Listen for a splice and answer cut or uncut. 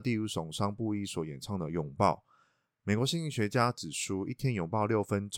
uncut